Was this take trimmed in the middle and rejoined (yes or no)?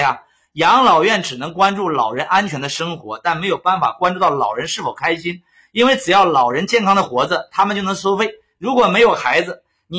no